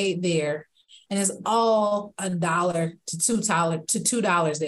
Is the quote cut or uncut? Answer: uncut